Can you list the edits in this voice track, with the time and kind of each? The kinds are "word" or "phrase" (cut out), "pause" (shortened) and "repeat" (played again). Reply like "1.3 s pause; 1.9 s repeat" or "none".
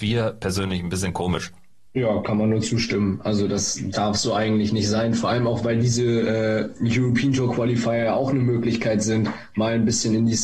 none